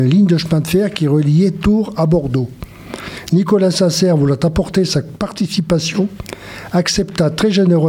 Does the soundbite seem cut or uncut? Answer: uncut